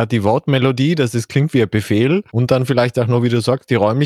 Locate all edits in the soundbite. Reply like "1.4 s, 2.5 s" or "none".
2.3 s